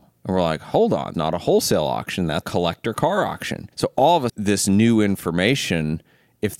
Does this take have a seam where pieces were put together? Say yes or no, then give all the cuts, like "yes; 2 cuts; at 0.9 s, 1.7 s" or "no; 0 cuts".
yes; 4 cuts; at 1.1 s, 2.4 s, 3.7 s, 4.3 s